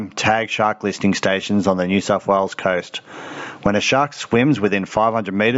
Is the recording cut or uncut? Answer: uncut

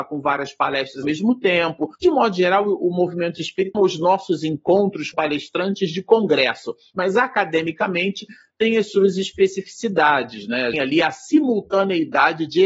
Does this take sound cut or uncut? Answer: cut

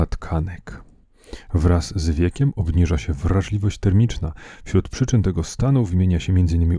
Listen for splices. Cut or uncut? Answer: uncut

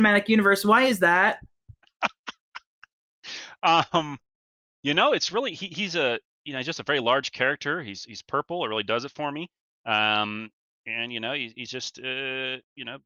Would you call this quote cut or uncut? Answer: uncut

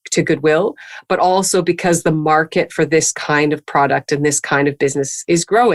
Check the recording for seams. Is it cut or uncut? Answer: uncut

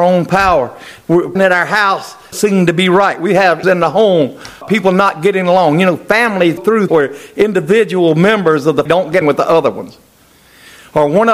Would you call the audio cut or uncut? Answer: cut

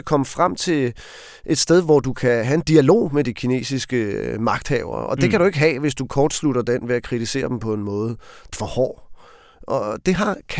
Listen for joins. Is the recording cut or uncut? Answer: cut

